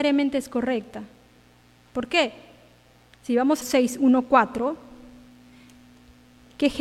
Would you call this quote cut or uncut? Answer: cut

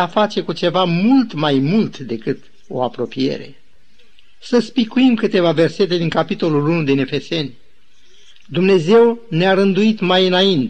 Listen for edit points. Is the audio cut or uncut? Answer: uncut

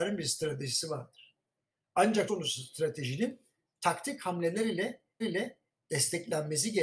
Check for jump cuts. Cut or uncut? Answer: cut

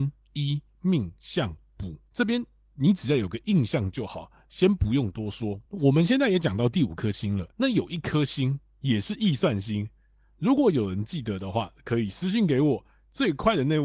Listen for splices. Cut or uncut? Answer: cut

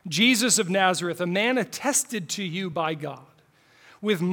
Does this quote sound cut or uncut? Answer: uncut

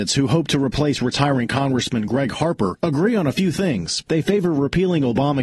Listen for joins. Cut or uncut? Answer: uncut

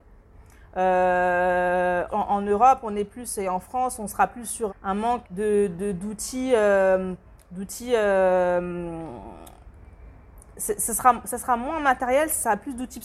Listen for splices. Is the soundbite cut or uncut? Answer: cut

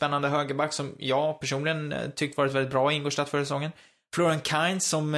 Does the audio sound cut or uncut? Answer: uncut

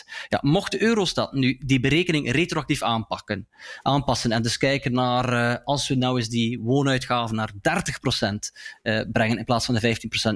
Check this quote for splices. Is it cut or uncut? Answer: uncut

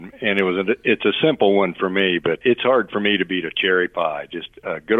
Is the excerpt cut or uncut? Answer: cut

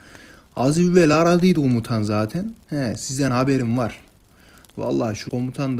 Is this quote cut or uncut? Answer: uncut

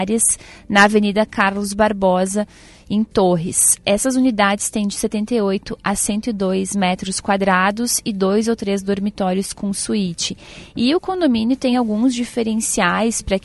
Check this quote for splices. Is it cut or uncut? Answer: uncut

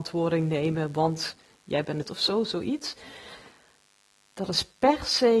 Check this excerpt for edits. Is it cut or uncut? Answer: cut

